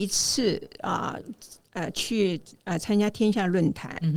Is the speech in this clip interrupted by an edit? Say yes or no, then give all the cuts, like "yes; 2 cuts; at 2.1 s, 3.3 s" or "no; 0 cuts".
no; 0 cuts